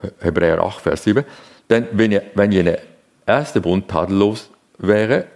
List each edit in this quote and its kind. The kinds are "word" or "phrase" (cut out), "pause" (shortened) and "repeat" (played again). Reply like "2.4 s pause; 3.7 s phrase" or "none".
none